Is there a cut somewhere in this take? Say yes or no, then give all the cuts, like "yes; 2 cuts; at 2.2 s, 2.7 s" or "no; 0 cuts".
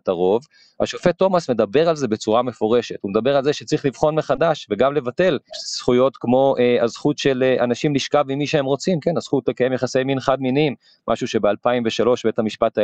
no; 0 cuts